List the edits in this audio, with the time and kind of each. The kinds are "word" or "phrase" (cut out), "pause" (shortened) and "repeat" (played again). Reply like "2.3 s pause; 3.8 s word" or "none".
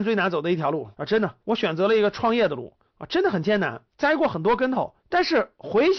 0.9 s pause; 1.4 s pause; 2.9 s pause; 3.9 s pause; 5.0 s pause